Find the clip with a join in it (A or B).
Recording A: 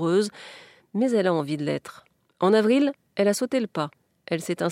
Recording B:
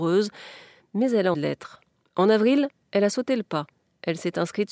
B